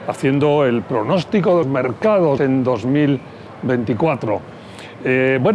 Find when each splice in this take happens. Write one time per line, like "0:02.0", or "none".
0:01.6
0:02.4